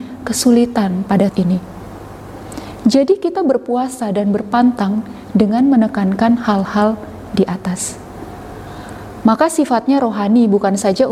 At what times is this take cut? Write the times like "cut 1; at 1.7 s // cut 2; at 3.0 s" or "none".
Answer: cut 1; at 1.3 s